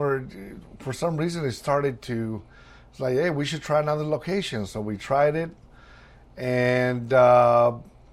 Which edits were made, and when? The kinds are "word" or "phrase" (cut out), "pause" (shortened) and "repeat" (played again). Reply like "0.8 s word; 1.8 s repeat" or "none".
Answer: none